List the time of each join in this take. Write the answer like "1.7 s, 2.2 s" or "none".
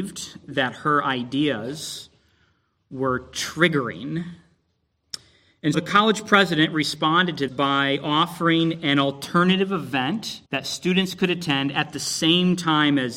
5.7 s, 7.5 s, 10.5 s